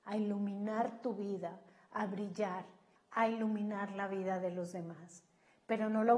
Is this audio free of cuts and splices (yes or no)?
no